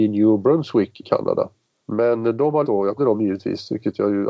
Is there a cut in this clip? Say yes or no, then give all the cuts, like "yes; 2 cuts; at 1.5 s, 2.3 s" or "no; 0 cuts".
yes; 3 cuts; at 1.0 s, 2.6 s, 3.0 s